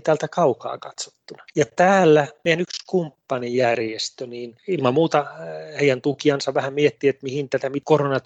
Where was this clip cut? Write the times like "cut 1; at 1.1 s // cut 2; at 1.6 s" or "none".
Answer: none